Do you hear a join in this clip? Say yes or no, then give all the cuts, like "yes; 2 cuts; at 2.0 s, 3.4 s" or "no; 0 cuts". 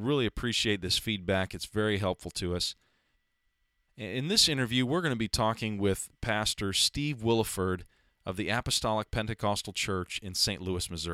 no; 0 cuts